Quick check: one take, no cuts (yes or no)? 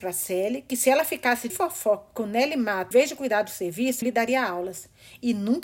no